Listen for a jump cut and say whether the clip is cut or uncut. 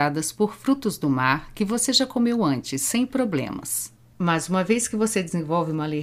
uncut